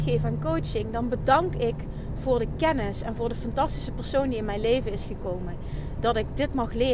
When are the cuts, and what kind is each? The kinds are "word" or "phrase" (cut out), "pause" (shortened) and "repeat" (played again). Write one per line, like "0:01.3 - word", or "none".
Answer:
none

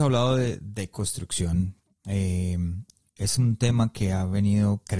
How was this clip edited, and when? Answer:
none

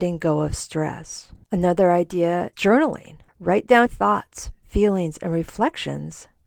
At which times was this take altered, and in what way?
0:01.4 - pause
0:02.5 - word
0:03.3 - pause
0:03.9 - word

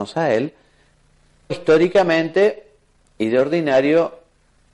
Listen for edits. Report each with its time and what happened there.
0:01.5 - word

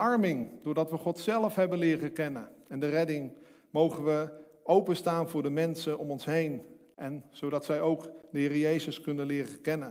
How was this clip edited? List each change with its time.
none

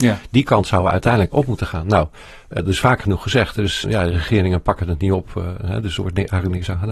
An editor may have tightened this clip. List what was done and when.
0:01.3 - word
0:02.6 - word
0:03.8 - word

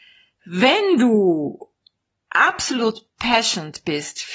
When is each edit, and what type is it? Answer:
0:03.1 - pause

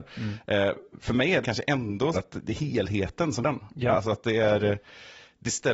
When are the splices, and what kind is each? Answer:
0:01.4 - word
0:02.1 - word
0:03.4 - word

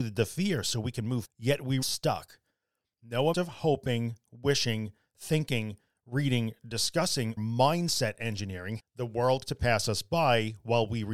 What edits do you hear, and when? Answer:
0:01.2 - word
0:01.8 - word
0:03.3 - word
0:07.4 - word
0:08.8 - word
0:09.5 - word

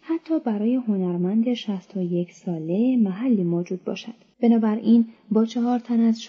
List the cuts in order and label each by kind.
0:04.3 - pause

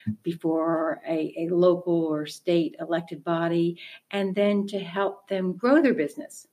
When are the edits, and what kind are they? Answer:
none

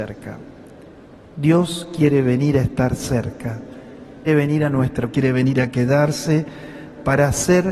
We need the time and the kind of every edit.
0:04.3 - word
0:05.1 - word

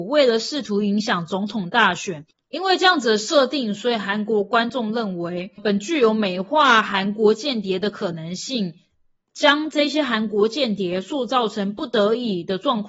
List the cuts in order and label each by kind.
0:05.6 - word

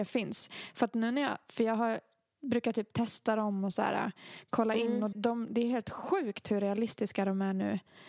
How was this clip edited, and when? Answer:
0:05.1 - word

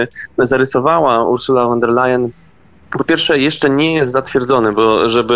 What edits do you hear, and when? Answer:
none

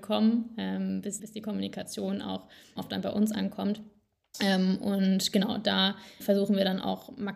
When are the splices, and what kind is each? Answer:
0:01.2 - word
0:02.8 - word
0:06.2 - word

